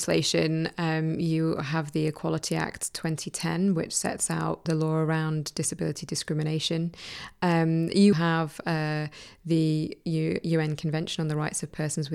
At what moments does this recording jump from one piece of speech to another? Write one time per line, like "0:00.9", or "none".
0:04.7
0:08.1